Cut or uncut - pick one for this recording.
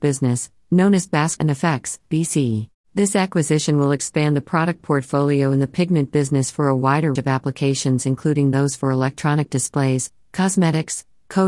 cut